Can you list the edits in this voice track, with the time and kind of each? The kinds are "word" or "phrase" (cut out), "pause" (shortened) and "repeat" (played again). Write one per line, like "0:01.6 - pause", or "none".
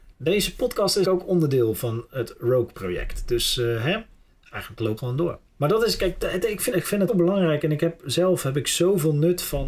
0:01.0 - word
0:02.7 - word
0:04.3 - pause
0:05.0 - word
0:05.5 - pause
0:06.7 - word
0:07.1 - word